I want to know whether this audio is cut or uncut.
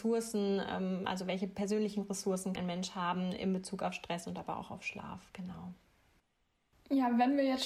cut